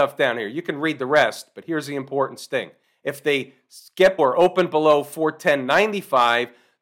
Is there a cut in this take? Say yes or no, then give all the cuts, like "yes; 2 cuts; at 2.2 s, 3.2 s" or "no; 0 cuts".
yes; 1 cut; at 4.2 s